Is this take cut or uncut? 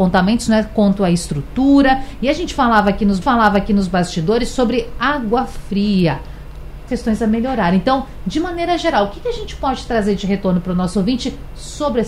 cut